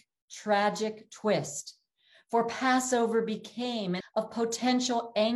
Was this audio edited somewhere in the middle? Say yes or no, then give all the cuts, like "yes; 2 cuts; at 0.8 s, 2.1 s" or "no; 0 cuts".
yes; 1 cut; at 4.0 s